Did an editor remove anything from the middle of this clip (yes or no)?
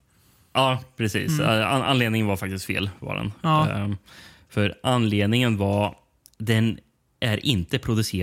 no